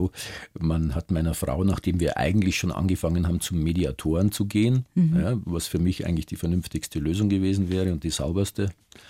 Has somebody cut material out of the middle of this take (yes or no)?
no